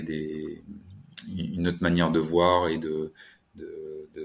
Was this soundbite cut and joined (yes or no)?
no